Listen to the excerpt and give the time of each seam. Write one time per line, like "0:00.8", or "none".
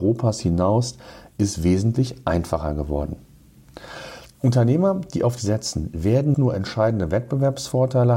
0:05.4
0:06.3